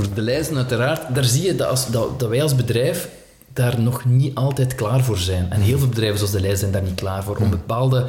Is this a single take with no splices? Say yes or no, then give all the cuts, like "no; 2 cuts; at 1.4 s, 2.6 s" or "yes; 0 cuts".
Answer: yes; 0 cuts